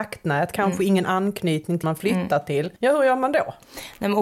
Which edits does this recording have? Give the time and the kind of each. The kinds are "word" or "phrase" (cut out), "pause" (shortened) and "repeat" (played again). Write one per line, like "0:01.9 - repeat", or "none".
0:01.8 - word
0:02.8 - pause